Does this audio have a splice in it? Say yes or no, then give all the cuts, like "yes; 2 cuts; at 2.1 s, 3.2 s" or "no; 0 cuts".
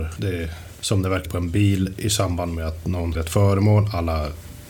yes; 2 cuts; at 1.2 s, 3.1 s